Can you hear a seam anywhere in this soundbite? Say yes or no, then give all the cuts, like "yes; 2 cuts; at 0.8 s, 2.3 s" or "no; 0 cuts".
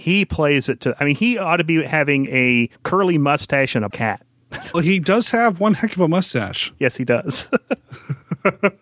yes; 3 cuts; at 2.7 s, 3.9 s, 4.7 s